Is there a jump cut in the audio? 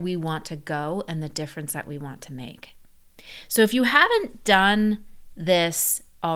no; 0 cuts

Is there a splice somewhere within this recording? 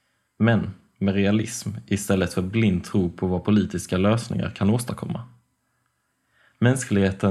no; 0 cuts

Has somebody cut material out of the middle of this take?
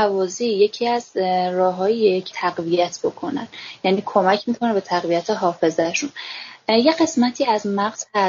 yes; 1 cut; at 2.3 s

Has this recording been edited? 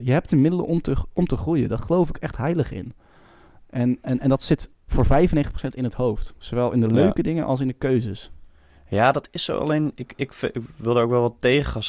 no; 0 cuts

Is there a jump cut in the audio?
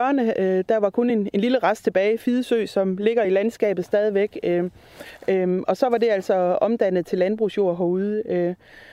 no; 0 cuts

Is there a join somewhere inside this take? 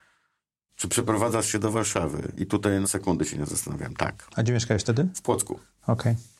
yes; 1 cut; at 2.8 s

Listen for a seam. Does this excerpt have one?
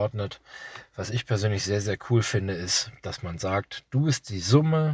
no; 0 cuts

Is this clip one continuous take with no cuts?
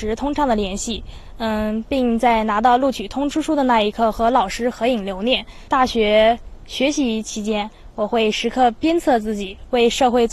yes; 0 cuts

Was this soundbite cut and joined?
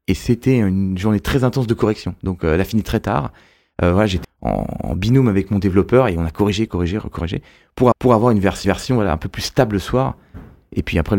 yes; 4 cuts; at 4.2 s, 6.7 s, 7.9 s, 8.6 s

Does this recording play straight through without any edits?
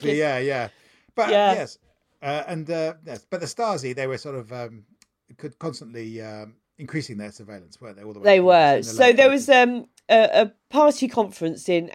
yes; 0 cuts

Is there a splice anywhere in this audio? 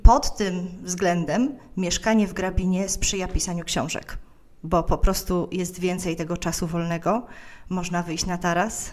no; 0 cuts

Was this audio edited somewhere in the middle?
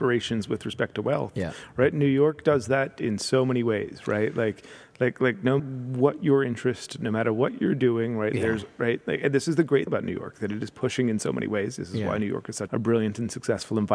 yes; 3 cuts; at 5.6 s, 9.9 s, 12.7 s

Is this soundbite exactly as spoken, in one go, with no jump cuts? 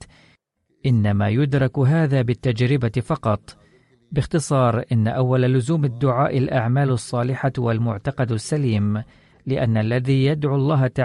yes; 0 cuts

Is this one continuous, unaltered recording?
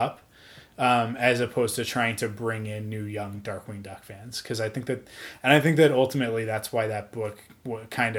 yes; 0 cuts

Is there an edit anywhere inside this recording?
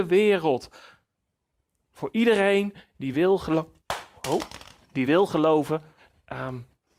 no; 0 cuts

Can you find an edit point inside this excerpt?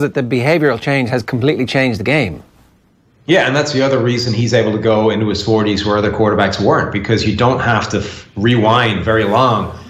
no; 0 cuts

